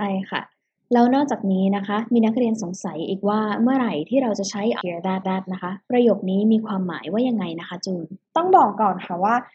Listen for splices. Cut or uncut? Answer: cut